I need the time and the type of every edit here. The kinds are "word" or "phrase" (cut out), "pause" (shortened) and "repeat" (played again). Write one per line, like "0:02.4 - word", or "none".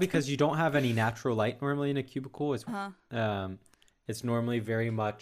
0:02.7 - word